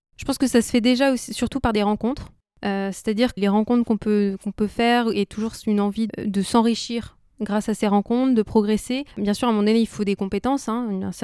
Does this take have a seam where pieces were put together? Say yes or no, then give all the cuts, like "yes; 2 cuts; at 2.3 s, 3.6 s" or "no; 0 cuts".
yes; 3 cuts; at 3.4 s, 6.1 s, 9.1 s